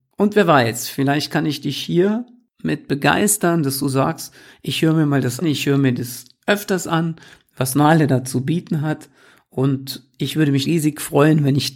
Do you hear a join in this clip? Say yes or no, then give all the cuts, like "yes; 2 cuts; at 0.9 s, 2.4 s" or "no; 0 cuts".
yes; 2 cuts; at 5.4 s, 10.6 s